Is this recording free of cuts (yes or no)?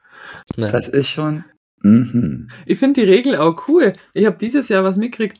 no